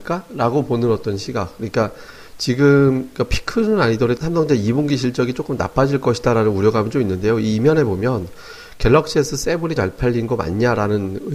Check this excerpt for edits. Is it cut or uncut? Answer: cut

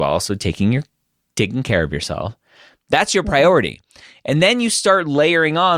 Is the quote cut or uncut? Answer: uncut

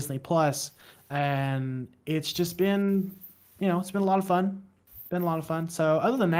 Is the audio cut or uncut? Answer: uncut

